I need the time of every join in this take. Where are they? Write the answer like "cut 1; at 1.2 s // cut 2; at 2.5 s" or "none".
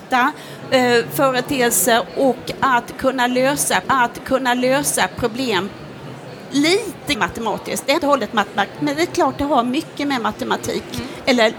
cut 1; at 3.8 s // cut 2; at 7.1 s // cut 3; at 8.0 s